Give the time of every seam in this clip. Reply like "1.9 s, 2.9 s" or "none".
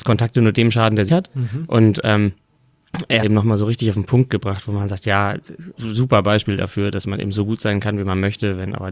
1.1 s, 3.2 s, 5.7 s